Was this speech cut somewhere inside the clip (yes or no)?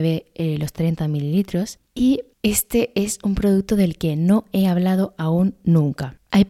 no